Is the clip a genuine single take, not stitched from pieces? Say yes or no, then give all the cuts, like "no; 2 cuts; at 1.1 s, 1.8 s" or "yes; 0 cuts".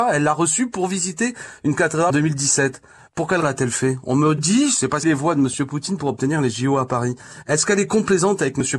no; 4 cuts; at 2.1 s, 3.4 s, 4.4 s, 5.0 s